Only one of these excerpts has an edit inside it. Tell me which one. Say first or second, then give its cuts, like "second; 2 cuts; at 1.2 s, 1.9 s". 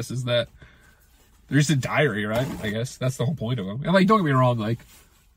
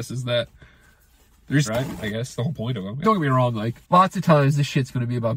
second; 4 cuts; at 1.7 s, 2.4 s, 3.0 s, 3.8 s